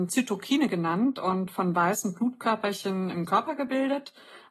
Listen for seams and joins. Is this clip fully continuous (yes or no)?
no